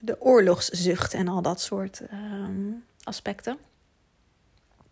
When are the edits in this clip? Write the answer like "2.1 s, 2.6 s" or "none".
none